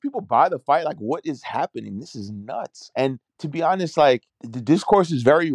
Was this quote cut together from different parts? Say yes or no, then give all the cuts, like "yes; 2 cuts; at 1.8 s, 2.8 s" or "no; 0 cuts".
yes; 2 cuts; at 3.3 s, 4.3 s